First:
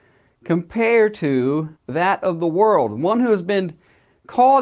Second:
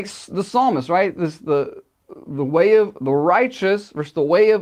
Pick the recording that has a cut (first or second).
first